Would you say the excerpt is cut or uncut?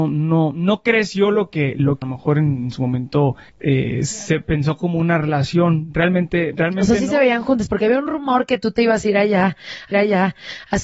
cut